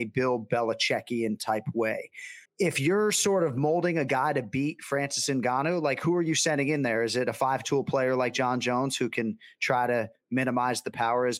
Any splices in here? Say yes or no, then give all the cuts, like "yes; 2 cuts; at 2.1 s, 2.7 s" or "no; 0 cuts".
yes; 1 cut; at 2.5 s